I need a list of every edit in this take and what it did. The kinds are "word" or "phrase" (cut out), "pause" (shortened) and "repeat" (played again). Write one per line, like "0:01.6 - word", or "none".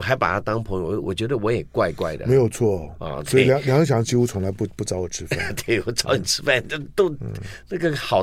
none